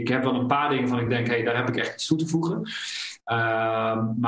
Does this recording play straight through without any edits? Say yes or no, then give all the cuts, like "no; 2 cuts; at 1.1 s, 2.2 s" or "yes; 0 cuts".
yes; 0 cuts